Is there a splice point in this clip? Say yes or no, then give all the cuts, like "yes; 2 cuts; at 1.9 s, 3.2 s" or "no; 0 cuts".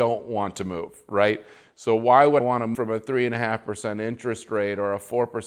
yes; 2 cuts; at 2.4 s, 2.7 s